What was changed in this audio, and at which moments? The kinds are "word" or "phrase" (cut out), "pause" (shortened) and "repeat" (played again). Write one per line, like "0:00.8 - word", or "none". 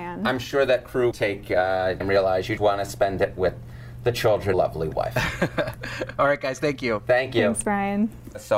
0:01.1 - word
0:02.0 - phrase
0:02.6 - word
0:04.5 - phrase